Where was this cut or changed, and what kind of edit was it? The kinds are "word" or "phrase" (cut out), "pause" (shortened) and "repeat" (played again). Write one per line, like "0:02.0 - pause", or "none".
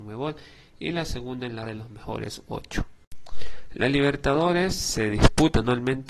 0:01.7 - word